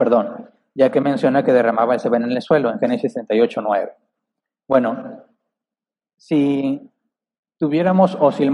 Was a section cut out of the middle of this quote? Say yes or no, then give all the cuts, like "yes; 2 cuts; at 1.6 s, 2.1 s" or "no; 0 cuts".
no; 0 cuts